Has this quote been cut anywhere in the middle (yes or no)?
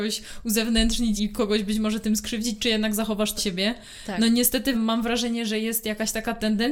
yes